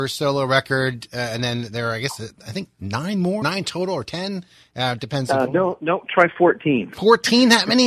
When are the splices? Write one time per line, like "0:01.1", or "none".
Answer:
0:03.4
0:06.0